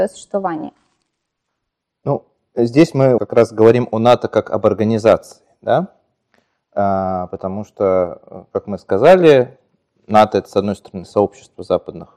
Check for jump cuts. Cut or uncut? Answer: cut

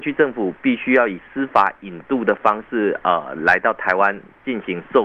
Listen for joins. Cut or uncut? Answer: uncut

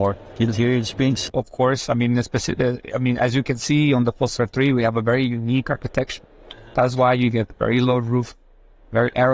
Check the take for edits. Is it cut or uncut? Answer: uncut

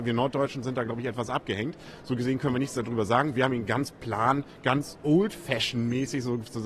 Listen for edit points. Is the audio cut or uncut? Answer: uncut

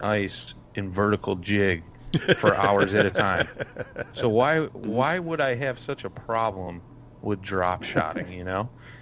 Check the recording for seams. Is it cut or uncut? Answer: uncut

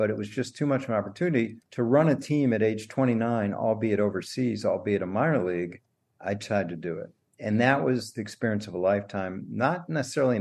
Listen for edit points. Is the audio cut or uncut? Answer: uncut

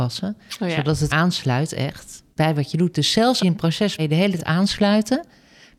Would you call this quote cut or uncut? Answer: cut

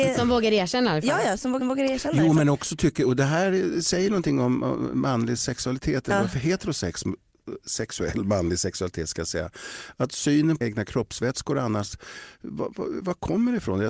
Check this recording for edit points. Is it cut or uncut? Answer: cut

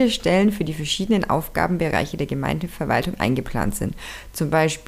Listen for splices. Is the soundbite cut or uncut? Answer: uncut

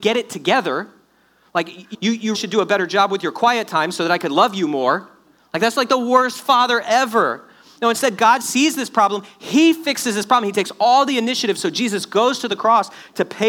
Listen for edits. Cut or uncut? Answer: cut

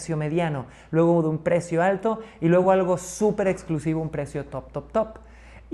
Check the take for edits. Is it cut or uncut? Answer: uncut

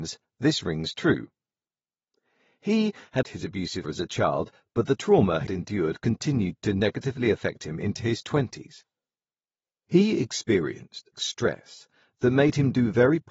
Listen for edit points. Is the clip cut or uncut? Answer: cut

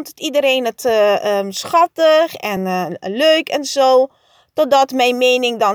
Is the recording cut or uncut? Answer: uncut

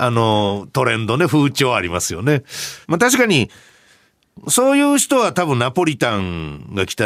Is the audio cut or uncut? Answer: cut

